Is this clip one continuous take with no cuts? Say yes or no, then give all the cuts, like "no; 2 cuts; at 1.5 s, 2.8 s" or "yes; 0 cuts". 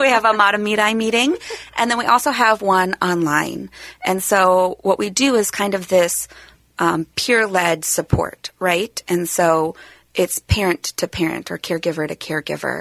yes; 0 cuts